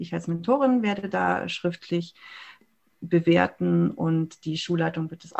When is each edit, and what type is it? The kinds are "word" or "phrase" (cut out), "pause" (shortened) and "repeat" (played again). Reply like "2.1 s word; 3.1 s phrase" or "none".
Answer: none